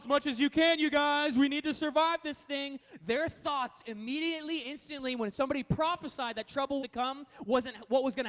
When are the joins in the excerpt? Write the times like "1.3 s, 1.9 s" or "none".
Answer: 4.6 s, 6.8 s